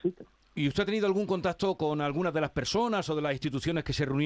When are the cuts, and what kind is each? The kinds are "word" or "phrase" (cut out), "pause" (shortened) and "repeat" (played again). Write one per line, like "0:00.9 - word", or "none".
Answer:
none